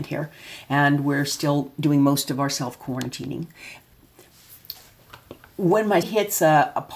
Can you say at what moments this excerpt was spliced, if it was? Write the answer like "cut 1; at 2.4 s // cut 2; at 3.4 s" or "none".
cut 1; at 6.0 s

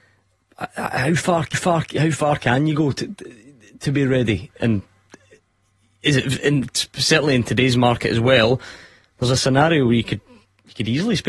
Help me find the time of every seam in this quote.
cut 1; at 1.5 s

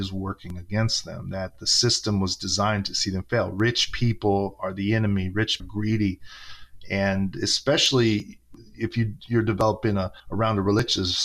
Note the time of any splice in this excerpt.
cut 1; at 5.6 s // cut 2; at 10.2 s

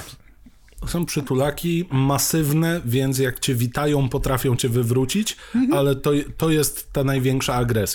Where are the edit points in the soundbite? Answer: none

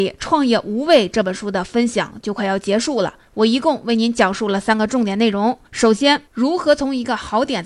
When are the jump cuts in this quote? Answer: cut 1; at 5.7 s // cut 2; at 6.3 s

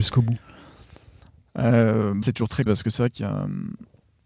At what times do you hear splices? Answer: cut 1; at 2.2 s // cut 2; at 2.7 s

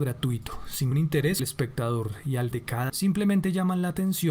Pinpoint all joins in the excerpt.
cut 1; at 0.9 s // cut 2; at 1.4 s // cut 3; at 2.5 s // cut 4; at 2.9 s

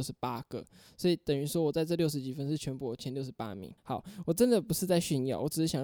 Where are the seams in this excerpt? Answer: cut 1; at 3.8 s

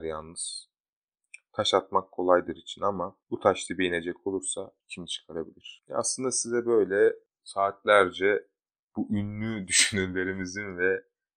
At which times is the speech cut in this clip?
cut 1; at 3.2 s // cut 2; at 4.8 s

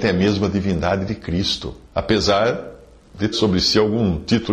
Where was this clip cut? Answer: cut 1; at 1.8 s // cut 2; at 3.3 s

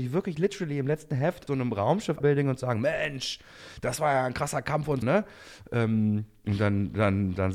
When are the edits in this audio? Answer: cut 1; at 1.5 s // cut 2; at 2.2 s // cut 3; at 5.0 s

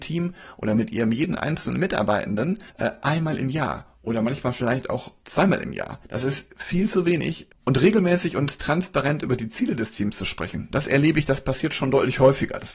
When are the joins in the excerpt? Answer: cut 1; at 2.7 s // cut 2; at 6.0 s // cut 3; at 7.5 s

